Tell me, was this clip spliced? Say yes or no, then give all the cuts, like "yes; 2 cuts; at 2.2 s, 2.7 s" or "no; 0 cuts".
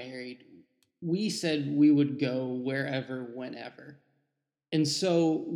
no; 0 cuts